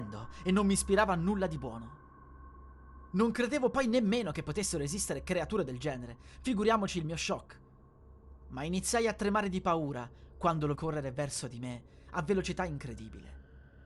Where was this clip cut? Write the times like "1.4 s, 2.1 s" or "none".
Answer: 10.7 s